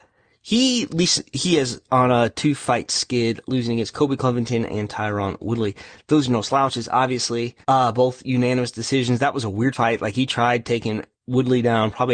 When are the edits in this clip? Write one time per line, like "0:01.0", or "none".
0:07.6
0:11.1